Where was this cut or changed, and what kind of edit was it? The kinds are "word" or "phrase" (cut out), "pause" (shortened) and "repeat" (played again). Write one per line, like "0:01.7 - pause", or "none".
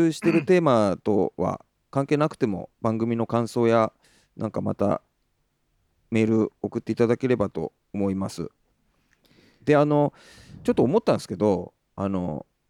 0:02.7 - pause
0:04.0 - pause

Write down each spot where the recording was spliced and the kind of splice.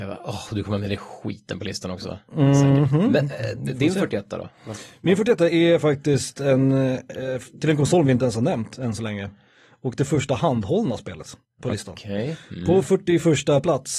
0:11.4 - pause

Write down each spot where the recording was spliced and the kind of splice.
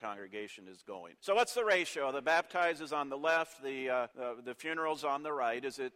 0:01.2 - pause
0:04.1 - pause

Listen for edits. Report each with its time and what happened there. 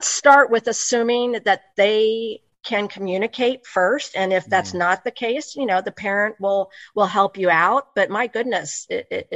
none

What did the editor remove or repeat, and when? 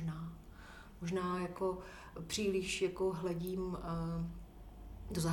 none

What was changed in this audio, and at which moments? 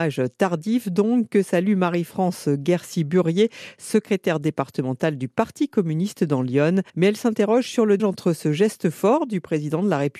0:06.9 - pause
0:08.0 - word

